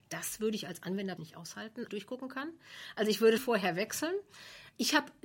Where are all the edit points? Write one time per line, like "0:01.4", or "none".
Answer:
0:01.2
0:01.9
0:03.4